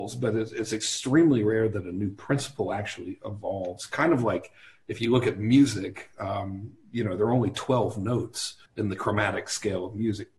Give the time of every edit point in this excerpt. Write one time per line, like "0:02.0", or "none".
0:08.7